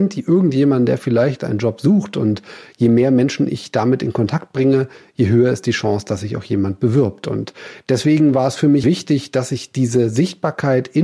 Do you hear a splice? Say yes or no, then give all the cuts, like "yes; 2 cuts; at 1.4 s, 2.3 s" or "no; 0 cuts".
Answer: yes; 1 cut; at 8.8 s